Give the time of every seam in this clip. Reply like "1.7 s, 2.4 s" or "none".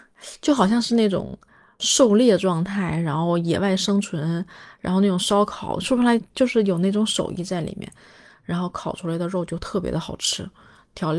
1.8 s